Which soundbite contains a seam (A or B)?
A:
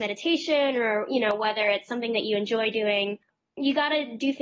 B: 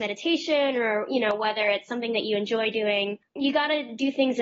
B